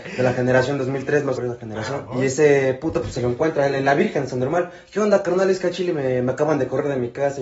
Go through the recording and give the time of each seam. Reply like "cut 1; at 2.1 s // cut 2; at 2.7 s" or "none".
cut 1; at 1.4 s // cut 2; at 2.1 s